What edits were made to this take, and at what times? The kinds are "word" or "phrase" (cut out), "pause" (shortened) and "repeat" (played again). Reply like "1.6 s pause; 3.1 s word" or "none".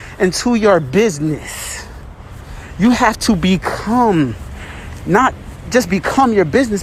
none

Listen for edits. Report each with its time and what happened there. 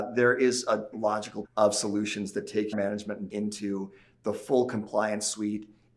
0.9 s word; 1.4 s word; 2.7 s phrase; 3.3 s word

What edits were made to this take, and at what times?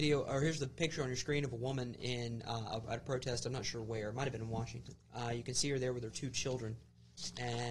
5.0 s pause

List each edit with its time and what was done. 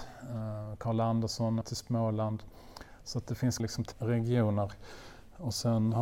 1.6 s word; 3.6 s word; 3.9 s word

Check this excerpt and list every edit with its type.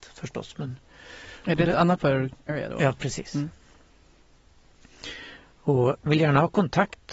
2.0 s word; 2.5 s word; 6.1 s word

